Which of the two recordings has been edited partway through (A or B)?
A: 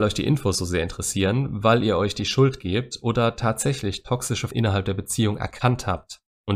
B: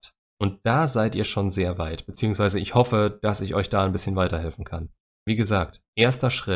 A